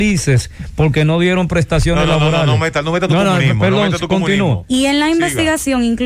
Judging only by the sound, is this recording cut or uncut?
uncut